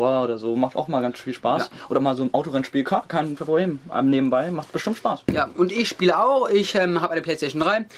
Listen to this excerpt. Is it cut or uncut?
uncut